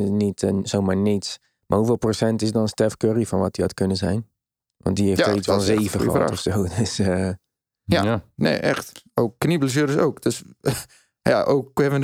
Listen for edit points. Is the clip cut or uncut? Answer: uncut